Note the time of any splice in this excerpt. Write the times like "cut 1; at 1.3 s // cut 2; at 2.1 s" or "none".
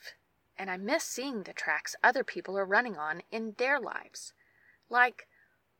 none